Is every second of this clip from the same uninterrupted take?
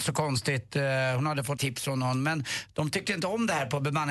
no; 1 cut; at 1.6 s

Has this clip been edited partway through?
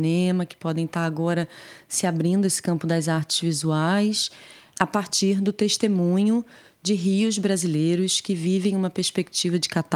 no; 0 cuts

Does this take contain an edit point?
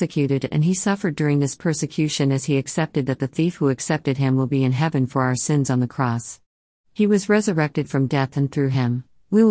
no; 0 cuts

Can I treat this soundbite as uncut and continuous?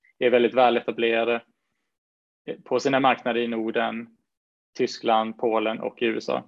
yes; 0 cuts

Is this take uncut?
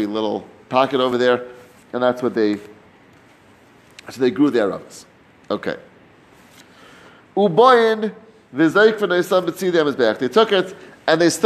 yes; 0 cuts

